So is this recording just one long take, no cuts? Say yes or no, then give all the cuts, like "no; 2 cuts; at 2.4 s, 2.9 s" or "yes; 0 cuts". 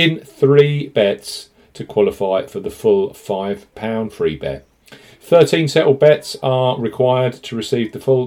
yes; 0 cuts